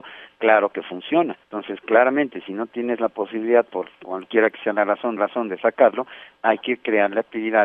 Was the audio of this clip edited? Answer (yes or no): yes